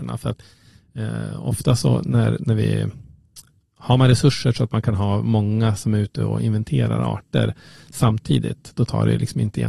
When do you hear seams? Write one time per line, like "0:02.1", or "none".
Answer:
none